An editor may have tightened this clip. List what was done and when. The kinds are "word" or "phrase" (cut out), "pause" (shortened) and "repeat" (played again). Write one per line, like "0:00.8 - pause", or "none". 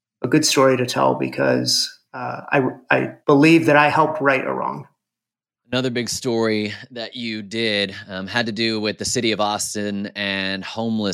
0:02.1 - pause
0:03.2 - pause
0:05.3 - pause